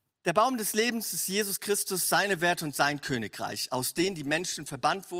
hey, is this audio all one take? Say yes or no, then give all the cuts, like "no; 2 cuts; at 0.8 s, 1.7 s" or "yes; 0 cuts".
yes; 0 cuts